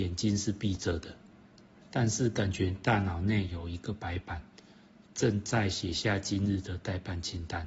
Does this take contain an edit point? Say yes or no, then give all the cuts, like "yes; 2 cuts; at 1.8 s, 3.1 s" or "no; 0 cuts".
no; 0 cuts